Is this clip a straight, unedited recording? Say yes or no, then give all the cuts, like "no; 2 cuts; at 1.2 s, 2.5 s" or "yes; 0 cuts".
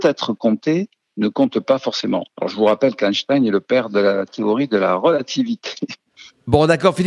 no; 1 cut; at 2.3 s